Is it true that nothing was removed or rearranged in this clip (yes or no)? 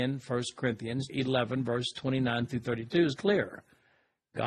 no